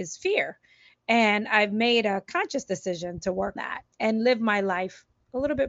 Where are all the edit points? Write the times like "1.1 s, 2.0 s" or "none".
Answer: 3.6 s, 3.9 s